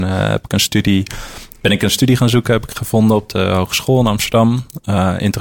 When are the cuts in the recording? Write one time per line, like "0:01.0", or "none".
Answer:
none